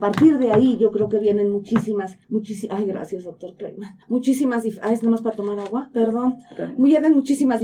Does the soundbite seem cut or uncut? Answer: cut